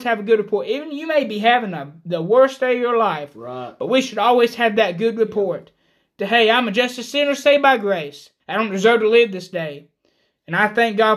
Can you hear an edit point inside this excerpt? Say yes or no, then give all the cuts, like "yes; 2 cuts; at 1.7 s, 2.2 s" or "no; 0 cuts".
yes; 1 cut; at 8.4 s